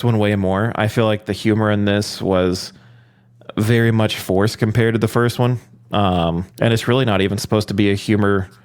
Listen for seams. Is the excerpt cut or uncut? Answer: cut